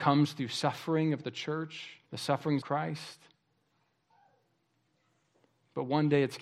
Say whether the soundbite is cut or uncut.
cut